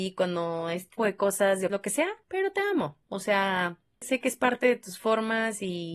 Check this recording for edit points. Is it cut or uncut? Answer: cut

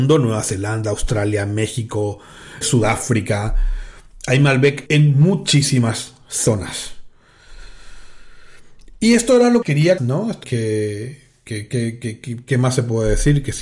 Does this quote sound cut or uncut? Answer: cut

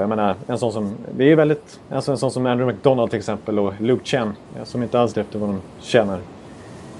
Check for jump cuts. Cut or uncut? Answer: cut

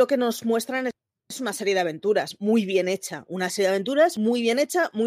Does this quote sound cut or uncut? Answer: uncut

